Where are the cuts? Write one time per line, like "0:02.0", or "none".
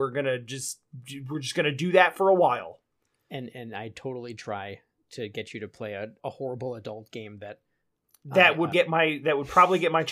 0:03.5
0:04.4
0:06.2
0:08.7